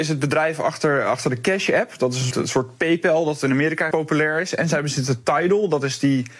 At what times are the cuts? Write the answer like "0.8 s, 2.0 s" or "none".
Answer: 2.3 s, 3.9 s